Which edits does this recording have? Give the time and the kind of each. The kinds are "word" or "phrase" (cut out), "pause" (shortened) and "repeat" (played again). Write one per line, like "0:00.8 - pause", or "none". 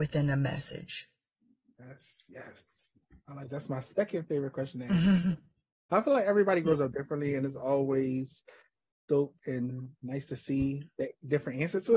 0:09.4 - pause